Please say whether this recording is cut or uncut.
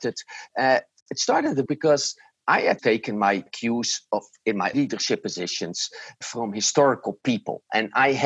cut